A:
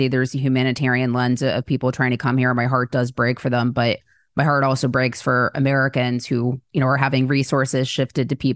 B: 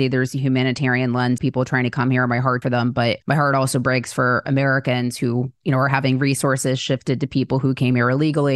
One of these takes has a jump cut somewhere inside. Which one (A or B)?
B